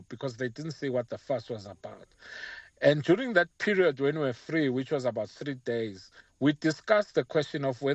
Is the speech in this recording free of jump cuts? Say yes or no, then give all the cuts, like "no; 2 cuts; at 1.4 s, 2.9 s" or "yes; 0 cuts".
yes; 0 cuts